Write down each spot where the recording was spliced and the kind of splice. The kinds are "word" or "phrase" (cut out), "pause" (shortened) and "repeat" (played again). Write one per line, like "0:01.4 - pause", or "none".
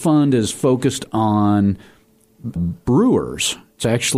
0:02.6 - word